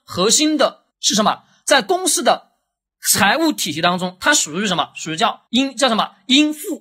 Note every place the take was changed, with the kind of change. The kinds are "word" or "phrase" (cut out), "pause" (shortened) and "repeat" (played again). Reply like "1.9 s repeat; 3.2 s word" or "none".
0.9 s pause; 5.5 s pause